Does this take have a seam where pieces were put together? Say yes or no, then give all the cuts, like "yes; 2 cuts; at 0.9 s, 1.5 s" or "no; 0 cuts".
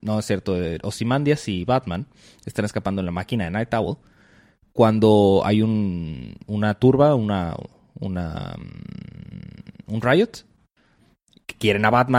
no; 0 cuts